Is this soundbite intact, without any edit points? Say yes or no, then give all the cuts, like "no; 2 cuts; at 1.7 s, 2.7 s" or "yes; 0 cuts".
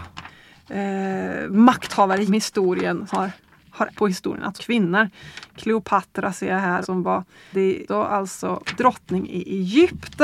no; 7 cuts; at 2.3 s, 3.1 s, 3.9 s, 4.6 s, 6.8 s, 7.5 s, 7.9 s